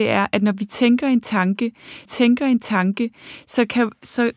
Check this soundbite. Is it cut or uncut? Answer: cut